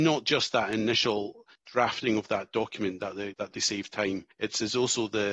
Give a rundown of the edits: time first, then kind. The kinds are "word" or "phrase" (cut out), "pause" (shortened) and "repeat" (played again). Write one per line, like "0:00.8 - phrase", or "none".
0:01.6 - pause
0:03.3 - word
0:04.3 - pause